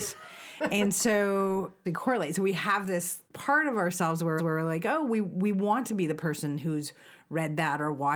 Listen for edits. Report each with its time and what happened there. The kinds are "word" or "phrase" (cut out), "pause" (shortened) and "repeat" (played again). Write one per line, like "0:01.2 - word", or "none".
0:01.9 - phrase
0:03.3 - pause
0:04.4 - repeat